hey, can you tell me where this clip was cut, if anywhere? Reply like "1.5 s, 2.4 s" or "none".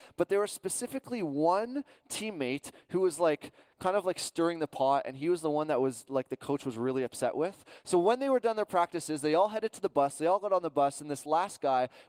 none